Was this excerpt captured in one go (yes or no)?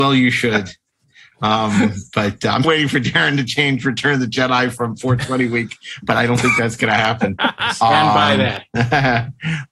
no